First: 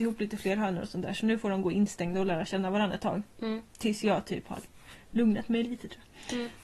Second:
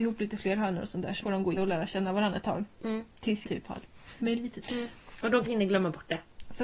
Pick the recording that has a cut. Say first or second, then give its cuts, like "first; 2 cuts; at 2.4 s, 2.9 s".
second; 6 cuts; at 1.2 s, 1.5 s, 3.4 s, 4.2 s, 4.6 s, 5.4 s